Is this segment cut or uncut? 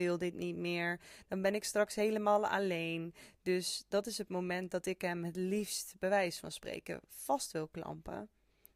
uncut